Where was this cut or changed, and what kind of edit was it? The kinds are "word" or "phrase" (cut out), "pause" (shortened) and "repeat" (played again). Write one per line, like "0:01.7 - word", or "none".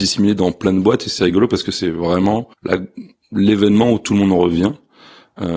0:02.5 - pause